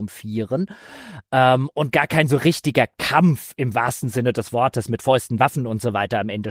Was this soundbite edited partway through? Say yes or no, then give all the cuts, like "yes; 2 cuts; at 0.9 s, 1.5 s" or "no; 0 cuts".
no; 0 cuts